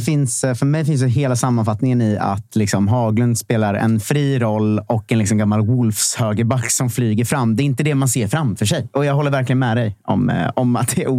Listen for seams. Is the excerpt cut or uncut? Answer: uncut